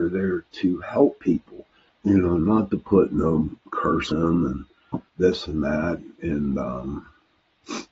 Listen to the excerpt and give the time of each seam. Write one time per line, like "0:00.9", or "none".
0:01.9
0:04.1
0:05.1